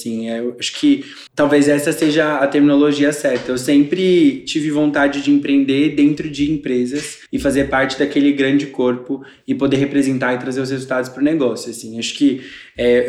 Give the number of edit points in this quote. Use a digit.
2